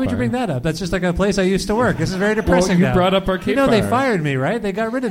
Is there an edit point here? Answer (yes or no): no